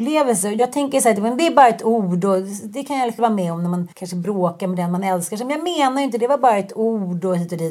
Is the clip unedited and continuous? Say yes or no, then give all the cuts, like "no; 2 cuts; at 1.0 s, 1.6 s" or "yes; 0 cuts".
no; 2 cuts; at 3.2 s, 3.9 s